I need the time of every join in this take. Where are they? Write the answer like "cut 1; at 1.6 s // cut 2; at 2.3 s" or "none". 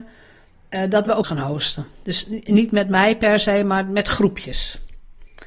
cut 1; at 1.2 s